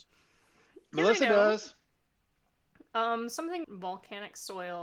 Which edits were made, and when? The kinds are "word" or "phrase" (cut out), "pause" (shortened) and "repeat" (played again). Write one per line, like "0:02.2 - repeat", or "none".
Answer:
0:03.6 - word